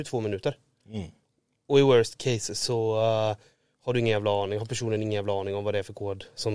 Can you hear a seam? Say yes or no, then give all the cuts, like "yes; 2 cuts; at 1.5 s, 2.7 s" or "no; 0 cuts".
no; 0 cuts